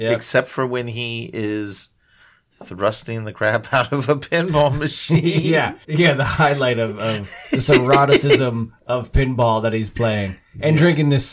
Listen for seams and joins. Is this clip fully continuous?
no; 1 cut; at 5.8 s

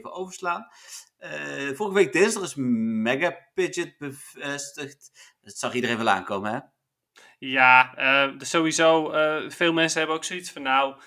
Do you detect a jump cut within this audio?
no; 0 cuts

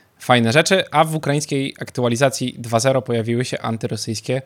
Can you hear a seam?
no; 0 cuts

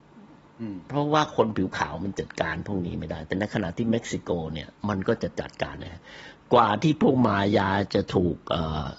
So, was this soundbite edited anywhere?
yes; 1 cut; at 4.8 s

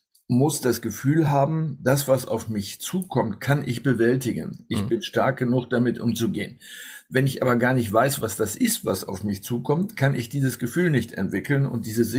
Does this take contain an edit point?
no; 0 cuts

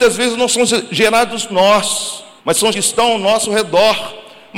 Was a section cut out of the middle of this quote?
yes; 3 cuts; at 1.5 s, 2.4 s, 2.7 s

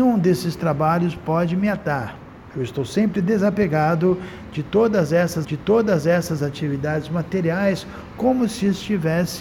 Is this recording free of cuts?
no; 1 cut; at 5.4 s

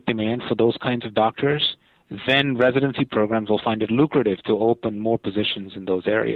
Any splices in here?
no; 0 cuts

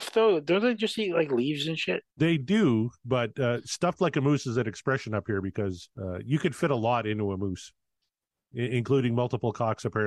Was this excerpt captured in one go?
no; 3 cuts; at 2.1 s, 5.9 s, 8.1 s

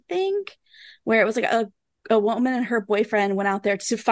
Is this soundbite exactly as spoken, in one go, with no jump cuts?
yes; 0 cuts

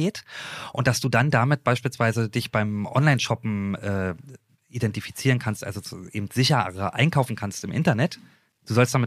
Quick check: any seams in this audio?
no; 0 cuts

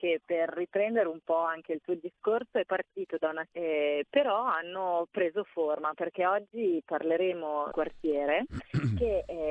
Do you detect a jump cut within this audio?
yes; 3 cuts; at 2.7 s, 3.5 s, 7.7 s

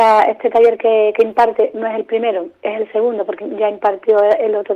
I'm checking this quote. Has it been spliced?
yes; 1 cut; at 3.4 s

